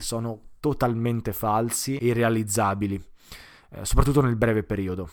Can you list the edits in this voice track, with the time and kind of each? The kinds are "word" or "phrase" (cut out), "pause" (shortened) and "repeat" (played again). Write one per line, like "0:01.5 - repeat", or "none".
0:02.0 - word